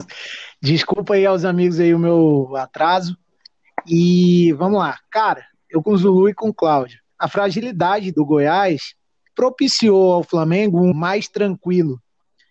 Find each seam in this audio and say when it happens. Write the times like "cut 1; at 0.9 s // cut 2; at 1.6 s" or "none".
cut 1; at 5.8 s // cut 2; at 7.1 s // cut 3; at 8.1 s // cut 4; at 9.3 s // cut 5; at 10.9 s